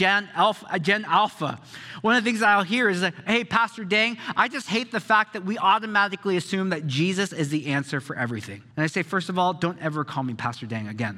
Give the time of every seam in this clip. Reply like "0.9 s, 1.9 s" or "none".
8.7 s